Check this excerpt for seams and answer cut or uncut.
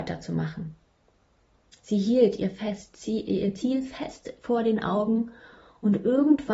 uncut